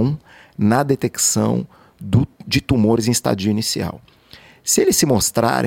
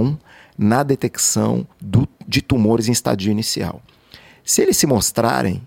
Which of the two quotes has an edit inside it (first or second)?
second